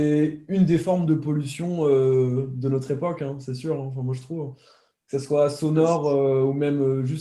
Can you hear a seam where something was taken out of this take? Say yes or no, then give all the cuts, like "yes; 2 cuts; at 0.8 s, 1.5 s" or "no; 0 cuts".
no; 0 cuts